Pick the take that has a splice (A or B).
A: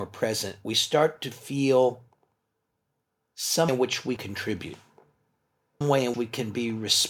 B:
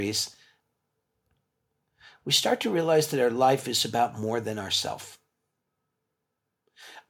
A